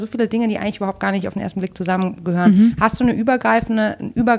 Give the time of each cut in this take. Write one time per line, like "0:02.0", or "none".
none